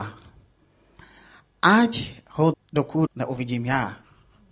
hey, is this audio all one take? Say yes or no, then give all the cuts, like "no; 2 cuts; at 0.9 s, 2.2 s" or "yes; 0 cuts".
no; 2 cuts; at 2.5 s, 3.1 s